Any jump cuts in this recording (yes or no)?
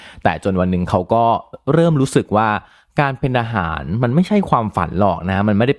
no